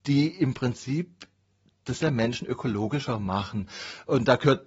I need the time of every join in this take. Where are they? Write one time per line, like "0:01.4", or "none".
0:02.0